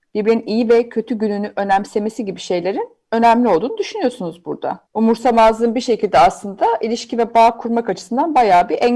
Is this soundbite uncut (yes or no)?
no